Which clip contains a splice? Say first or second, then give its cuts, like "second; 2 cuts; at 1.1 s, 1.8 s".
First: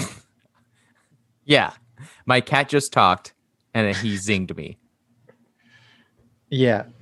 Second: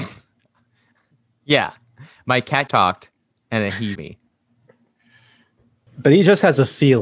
second; 3 cuts; at 2.7 s, 4.0 s, 5.9 s